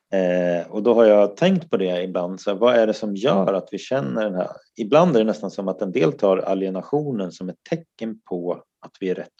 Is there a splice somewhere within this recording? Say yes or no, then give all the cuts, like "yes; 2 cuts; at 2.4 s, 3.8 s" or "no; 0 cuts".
no; 0 cuts